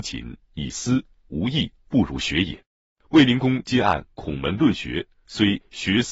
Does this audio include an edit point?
yes; 1 cut; at 2.6 s

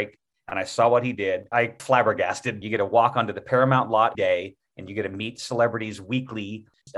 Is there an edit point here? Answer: yes; 2 cuts; at 1.8 s, 4.1 s

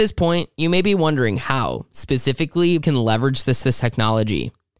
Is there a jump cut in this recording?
yes; 2 cuts; at 2.8 s, 3.6 s

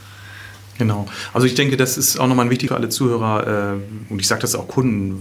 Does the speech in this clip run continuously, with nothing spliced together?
no; 1 cut; at 2.7 s

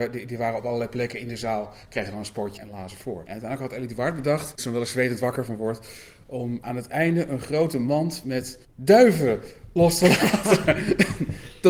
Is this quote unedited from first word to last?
no; 2 cuts; at 2.6 s, 4.6 s

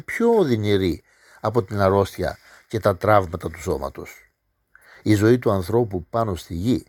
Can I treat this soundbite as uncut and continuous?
yes; 0 cuts

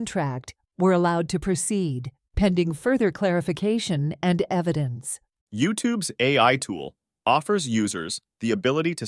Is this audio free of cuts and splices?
yes; 0 cuts

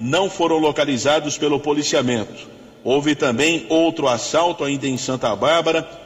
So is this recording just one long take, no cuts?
yes; 0 cuts

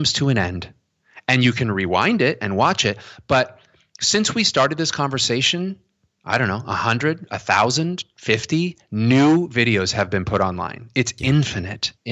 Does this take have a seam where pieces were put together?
no; 0 cuts

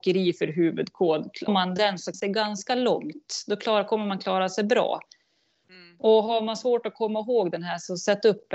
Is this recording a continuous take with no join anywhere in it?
no; 2 cuts; at 1.5 s, 2.1 s

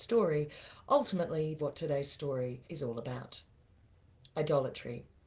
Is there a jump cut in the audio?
yes; 2 cuts; at 1.6 s, 2.6 s

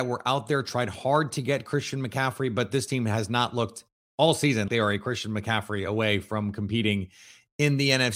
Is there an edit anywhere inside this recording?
yes; 1 cut; at 4.7 s

